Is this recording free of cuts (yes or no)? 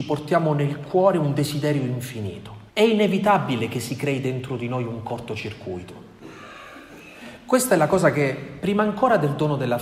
no